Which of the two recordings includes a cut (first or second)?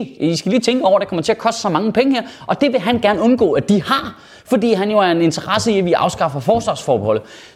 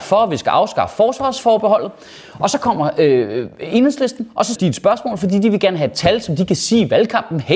second